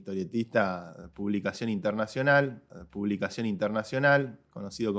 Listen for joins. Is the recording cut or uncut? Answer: cut